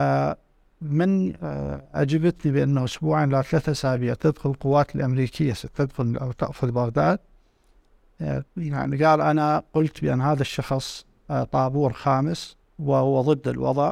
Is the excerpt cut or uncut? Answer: cut